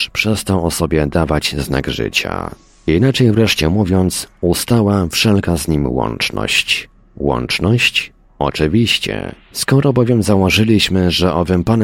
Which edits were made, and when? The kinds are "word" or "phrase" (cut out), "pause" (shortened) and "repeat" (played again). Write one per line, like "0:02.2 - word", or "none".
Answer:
none